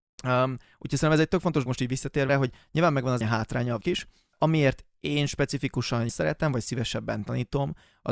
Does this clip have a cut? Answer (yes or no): yes